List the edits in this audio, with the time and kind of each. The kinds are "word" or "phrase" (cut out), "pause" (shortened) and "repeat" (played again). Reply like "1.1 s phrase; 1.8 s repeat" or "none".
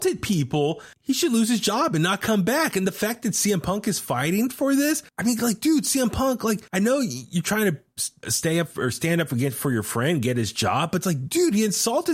0.9 s pause; 5.1 s pause; 6.7 s pause; 8.2 s word